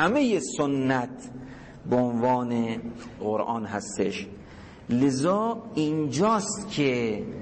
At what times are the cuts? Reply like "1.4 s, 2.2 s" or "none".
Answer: 3.2 s